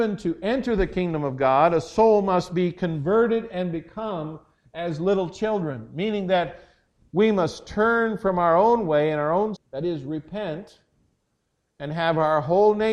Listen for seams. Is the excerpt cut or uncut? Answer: cut